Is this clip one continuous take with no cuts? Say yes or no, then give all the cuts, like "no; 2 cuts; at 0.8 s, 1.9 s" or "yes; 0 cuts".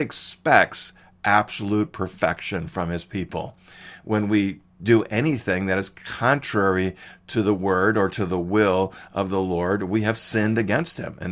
yes; 0 cuts